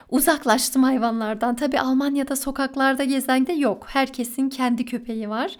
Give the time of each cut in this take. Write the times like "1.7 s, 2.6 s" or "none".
3.4 s